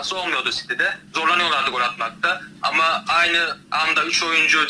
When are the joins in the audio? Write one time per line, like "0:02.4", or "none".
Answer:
0:01.1
0:03.6